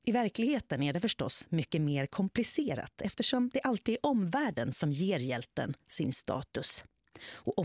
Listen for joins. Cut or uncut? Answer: uncut